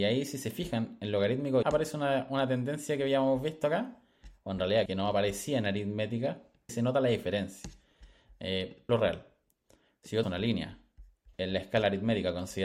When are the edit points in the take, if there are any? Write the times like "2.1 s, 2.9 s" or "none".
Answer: 1.6 s, 4.9 s, 6.7 s, 8.9 s, 10.2 s, 11.3 s